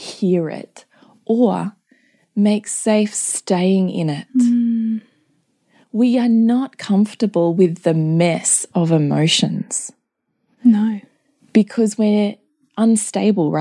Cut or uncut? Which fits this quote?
uncut